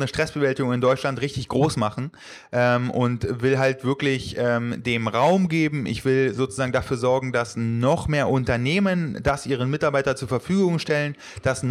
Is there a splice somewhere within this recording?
no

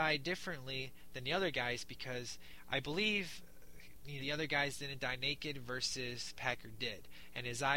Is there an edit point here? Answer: yes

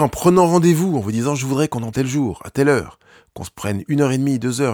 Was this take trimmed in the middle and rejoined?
yes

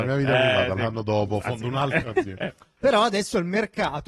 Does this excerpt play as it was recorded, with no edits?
yes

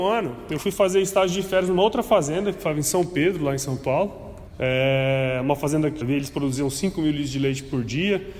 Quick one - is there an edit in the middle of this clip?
yes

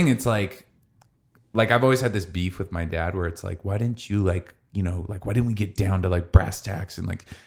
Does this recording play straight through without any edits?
yes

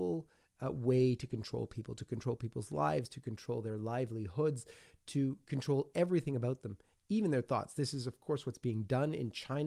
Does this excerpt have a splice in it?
no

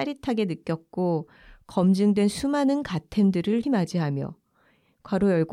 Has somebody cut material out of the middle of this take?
yes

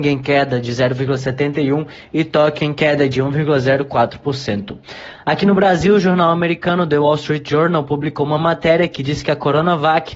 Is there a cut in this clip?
no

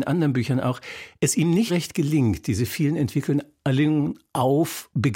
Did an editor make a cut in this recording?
yes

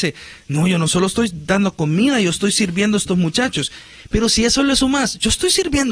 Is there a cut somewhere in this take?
no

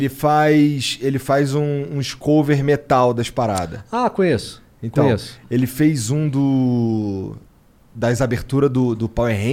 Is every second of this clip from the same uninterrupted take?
yes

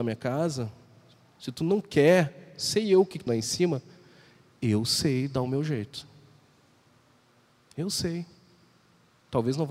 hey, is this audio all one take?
no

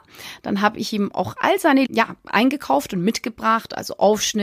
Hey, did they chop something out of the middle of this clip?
yes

